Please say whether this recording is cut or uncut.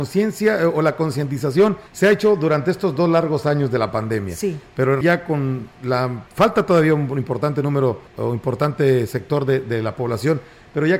cut